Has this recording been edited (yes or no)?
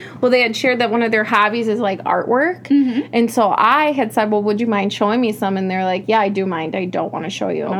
no